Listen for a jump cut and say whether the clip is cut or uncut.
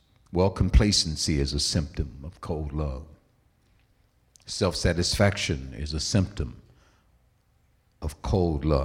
uncut